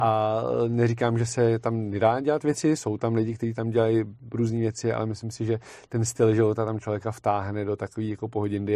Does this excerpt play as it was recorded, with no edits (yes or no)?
yes